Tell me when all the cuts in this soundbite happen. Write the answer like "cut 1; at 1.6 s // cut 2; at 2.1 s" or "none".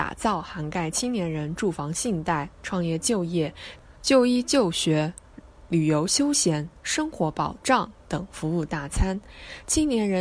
cut 1; at 4.0 s